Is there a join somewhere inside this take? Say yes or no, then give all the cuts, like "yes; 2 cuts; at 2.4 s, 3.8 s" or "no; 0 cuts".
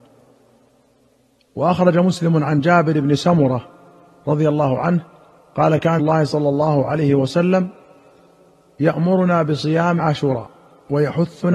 yes; 2 cuts; at 6.0 s, 10.0 s